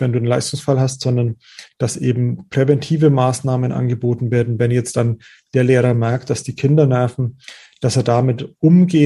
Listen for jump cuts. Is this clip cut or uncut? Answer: uncut